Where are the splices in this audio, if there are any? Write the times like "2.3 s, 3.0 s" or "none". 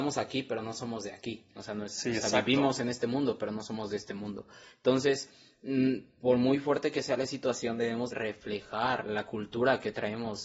8.1 s